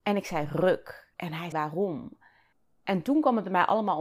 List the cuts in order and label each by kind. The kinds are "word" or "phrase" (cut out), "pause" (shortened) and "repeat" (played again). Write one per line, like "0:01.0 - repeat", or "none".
0:01.1 - pause
0:01.5 - word